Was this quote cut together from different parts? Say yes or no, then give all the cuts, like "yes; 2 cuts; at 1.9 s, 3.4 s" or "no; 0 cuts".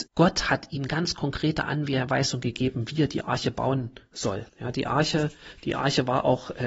yes; 1 cut; at 4.5 s